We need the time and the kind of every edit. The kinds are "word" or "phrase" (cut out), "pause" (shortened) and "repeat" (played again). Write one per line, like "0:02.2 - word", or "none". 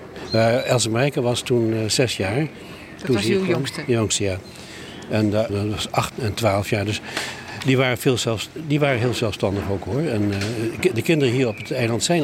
0:05.5 - phrase
0:06.1 - word